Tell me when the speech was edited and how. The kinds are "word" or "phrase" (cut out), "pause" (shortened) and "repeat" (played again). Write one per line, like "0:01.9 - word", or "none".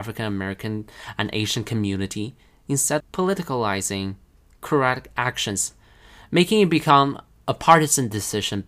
0:03.0 - word